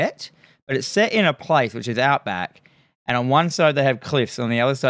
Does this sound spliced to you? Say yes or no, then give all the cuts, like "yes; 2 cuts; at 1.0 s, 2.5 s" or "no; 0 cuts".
no; 0 cuts